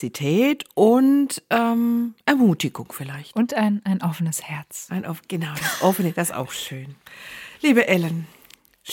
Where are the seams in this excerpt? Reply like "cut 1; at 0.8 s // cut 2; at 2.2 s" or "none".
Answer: none